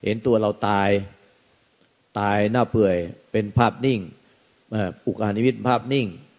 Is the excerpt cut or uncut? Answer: uncut